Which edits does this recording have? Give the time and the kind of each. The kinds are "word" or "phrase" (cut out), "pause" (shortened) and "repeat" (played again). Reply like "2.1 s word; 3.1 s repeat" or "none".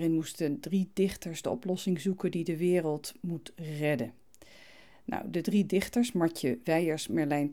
none